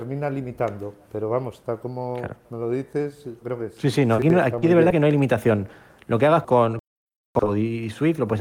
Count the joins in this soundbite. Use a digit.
2